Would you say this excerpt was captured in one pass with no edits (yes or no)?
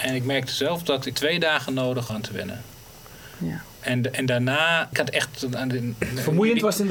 no